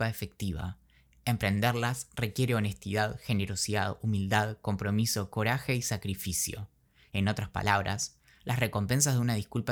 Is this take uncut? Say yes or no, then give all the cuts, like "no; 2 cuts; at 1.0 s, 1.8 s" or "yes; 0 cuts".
yes; 0 cuts